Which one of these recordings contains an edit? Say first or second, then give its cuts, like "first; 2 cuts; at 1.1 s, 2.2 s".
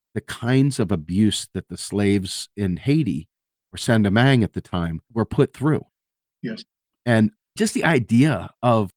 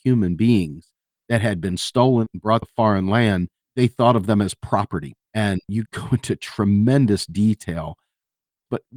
second; 3 cuts; at 2.6 s, 3.6 s, 5.2 s